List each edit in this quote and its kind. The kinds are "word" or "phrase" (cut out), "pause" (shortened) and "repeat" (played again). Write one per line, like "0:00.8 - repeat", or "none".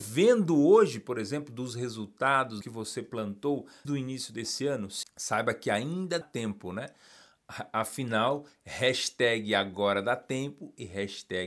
0:02.6 - word
0:03.8 - word
0:05.0 - word
0:06.2 - word